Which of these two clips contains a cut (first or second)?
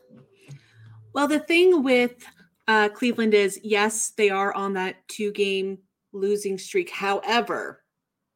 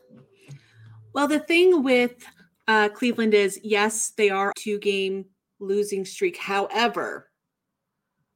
second